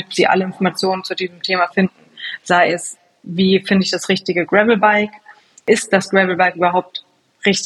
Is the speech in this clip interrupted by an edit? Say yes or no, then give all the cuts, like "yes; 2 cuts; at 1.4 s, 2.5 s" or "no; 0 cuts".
no; 0 cuts